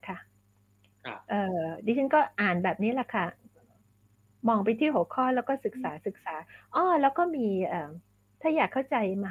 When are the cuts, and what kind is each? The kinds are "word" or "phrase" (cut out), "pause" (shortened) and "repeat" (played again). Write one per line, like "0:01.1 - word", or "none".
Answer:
none